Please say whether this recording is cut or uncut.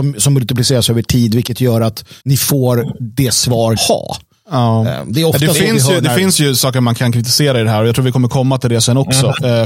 cut